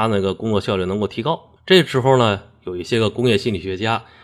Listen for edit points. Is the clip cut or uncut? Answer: cut